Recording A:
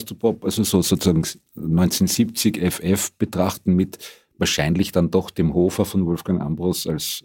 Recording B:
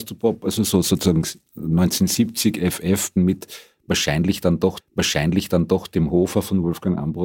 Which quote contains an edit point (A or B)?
B